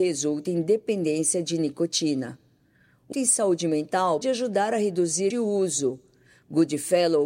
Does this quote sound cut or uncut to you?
cut